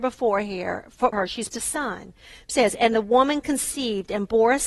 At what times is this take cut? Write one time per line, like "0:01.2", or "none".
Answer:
0:01.1
0:01.5
0:02.5